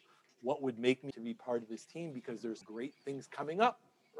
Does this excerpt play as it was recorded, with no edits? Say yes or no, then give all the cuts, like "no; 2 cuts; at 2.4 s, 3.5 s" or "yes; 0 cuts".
no; 2 cuts; at 1.1 s, 2.6 s